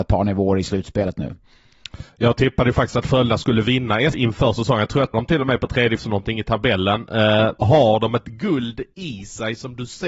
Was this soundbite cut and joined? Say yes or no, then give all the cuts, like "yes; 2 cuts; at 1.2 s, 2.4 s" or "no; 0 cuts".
yes; 4 cuts; at 4.1 s, 5.1 s, 6.0 s, 7.6 s